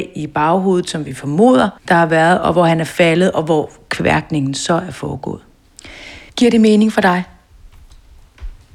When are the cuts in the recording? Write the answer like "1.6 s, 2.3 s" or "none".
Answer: 1.8 s, 6.3 s